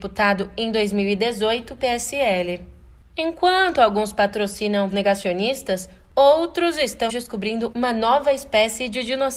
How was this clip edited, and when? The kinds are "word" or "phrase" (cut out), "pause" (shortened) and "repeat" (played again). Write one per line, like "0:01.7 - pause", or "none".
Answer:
0:01.8 - word
0:04.9 - word
0:07.1 - word